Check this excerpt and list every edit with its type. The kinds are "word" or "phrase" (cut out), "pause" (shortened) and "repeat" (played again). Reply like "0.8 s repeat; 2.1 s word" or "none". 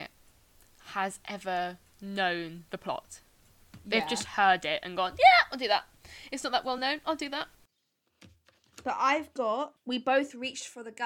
none